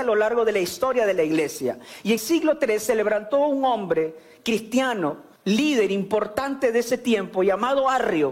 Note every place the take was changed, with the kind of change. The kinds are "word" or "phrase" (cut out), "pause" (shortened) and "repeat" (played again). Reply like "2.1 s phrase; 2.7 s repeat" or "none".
2.2 s word; 5.4 s pause